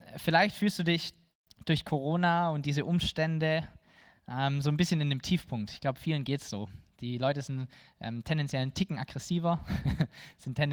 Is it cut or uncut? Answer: uncut